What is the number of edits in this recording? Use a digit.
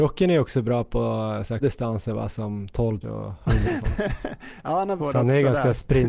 4